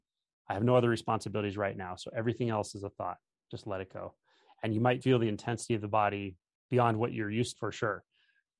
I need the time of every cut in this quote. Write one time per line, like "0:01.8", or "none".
0:05.0
0:07.5